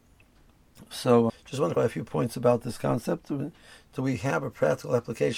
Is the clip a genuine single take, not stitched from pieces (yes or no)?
no